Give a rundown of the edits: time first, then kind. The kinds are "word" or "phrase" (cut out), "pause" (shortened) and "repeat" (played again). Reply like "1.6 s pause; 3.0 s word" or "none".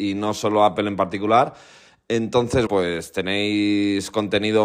2.7 s word